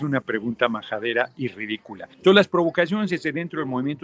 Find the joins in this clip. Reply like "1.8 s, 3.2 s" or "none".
2.1 s